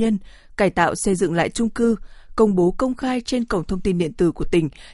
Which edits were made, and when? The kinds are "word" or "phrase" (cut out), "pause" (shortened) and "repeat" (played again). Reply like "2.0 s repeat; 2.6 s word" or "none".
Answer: none

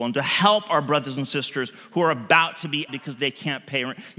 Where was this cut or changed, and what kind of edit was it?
2.9 s word

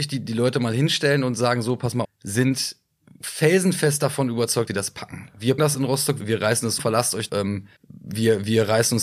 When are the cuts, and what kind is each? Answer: 2.0 s phrase; 4.7 s word; 5.6 s word; 6.2 s word; 6.8 s word; 7.3 s word; 7.8 s pause

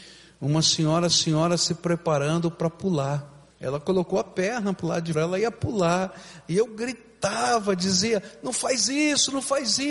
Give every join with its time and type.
1.1 s repeat; 3.5 s pause; 5.1 s word

